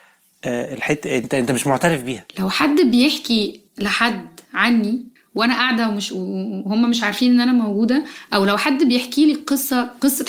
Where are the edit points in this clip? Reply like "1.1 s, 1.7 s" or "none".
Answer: 2.3 s, 3.7 s, 5.2 s